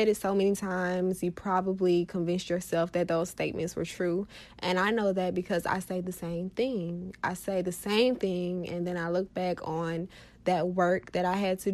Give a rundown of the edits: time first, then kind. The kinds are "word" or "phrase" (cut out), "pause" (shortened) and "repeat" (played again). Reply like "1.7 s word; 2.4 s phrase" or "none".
none